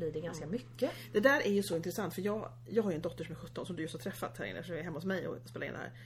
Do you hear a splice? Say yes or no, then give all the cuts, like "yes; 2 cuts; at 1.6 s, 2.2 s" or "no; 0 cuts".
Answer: no; 0 cuts